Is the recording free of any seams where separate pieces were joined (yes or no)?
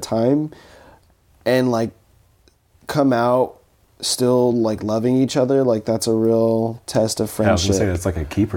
yes